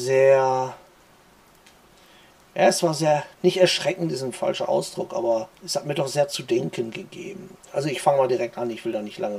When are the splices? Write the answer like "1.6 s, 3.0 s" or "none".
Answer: 3.3 s, 5.6 s